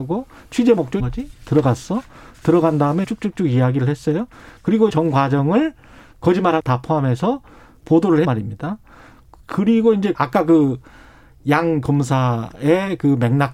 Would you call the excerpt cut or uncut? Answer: cut